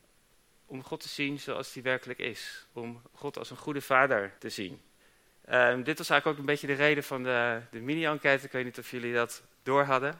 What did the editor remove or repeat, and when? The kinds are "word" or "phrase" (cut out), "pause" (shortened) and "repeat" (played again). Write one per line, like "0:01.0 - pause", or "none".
0:02.7 - pause
0:04.4 - pause
0:05.0 - pause

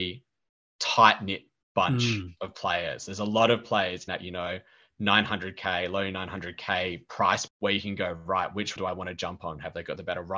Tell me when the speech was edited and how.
0:04.1 - word
0:07.5 - word
0:08.8 - word

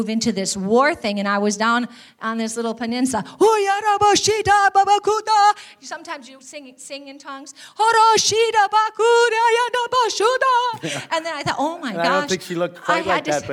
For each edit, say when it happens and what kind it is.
none

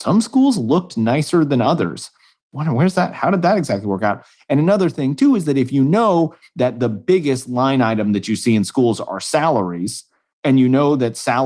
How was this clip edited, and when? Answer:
none

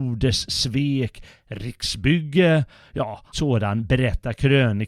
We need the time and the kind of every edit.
0:03.3 - word

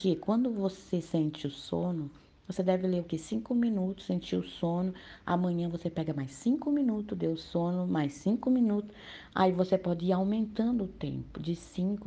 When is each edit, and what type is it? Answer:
none

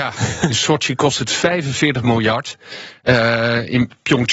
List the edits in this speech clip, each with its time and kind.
none

